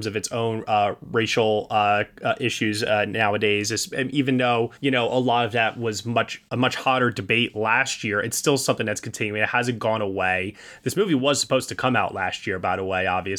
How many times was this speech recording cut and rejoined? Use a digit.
1